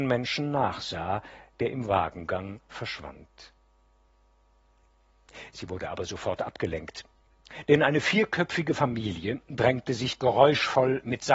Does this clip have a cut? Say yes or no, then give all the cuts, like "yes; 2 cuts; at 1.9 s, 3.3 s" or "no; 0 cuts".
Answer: no; 0 cuts